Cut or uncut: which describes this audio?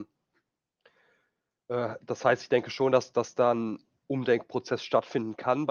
uncut